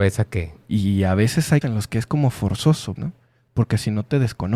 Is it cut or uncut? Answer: cut